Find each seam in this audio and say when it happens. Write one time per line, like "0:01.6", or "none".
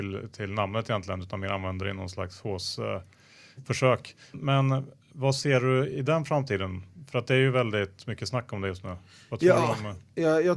0:04.3